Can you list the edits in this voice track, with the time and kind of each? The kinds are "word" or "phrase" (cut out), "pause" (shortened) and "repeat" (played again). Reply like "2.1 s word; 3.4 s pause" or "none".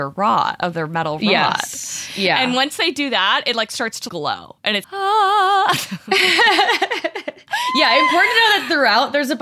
4.1 s word; 4.8 s word